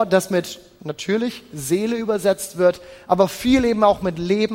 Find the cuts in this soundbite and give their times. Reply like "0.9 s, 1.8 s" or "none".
none